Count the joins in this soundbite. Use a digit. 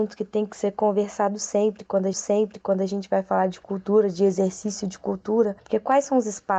1